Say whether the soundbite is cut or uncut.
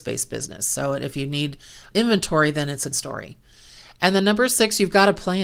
cut